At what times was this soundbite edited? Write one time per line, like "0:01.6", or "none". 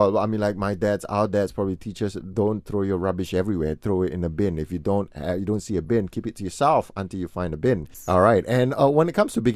none